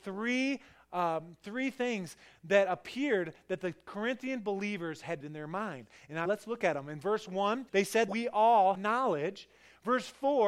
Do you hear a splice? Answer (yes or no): yes